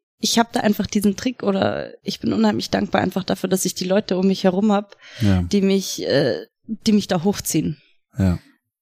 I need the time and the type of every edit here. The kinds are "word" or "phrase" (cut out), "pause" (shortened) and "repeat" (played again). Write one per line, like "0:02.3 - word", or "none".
none